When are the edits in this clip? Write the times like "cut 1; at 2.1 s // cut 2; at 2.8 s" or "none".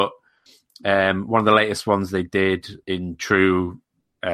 cut 1; at 2.8 s